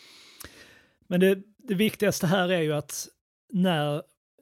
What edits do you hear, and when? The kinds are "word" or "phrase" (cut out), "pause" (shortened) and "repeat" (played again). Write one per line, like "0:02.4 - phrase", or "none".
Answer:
none